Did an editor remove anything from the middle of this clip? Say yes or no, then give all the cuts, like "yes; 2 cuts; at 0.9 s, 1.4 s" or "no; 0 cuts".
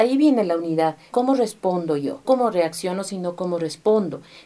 yes; 2 cuts; at 1.1 s, 2.2 s